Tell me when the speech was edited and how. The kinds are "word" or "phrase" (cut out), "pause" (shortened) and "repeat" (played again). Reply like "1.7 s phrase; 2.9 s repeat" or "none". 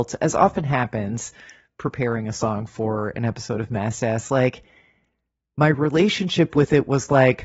none